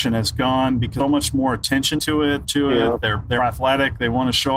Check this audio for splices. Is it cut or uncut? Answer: cut